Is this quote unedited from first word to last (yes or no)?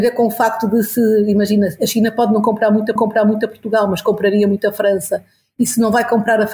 no